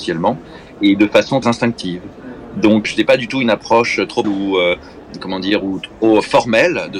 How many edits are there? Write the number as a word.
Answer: three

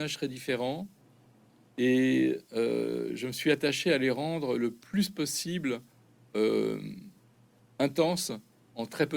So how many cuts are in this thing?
zero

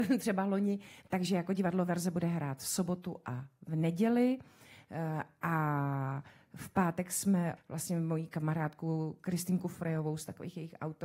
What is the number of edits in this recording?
one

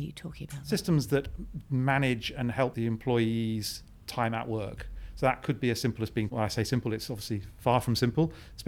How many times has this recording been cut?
two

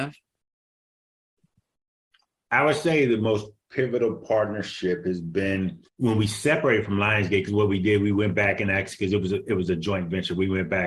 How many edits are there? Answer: one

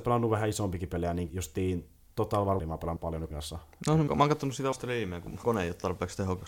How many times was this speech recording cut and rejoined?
seven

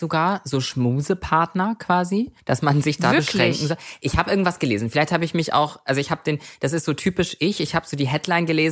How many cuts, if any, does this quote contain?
one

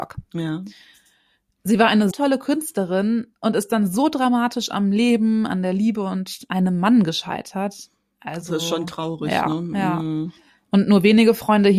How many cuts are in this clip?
one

